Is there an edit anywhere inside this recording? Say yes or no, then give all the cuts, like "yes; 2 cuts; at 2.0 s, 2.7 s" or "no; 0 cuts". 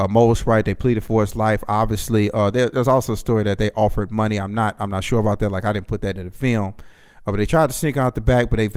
no; 0 cuts